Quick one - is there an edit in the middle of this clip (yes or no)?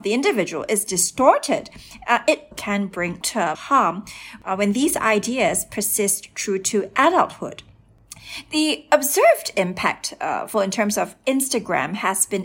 yes